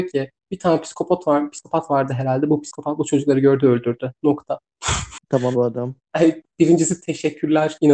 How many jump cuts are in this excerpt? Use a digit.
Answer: 1